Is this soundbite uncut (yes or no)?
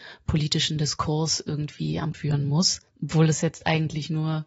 no